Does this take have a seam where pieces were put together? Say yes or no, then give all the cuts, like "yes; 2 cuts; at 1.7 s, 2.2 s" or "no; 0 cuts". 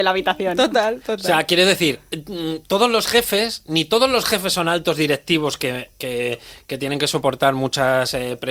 no; 0 cuts